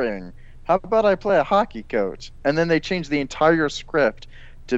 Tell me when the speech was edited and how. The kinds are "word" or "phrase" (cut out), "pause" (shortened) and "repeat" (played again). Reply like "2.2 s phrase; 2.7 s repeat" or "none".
none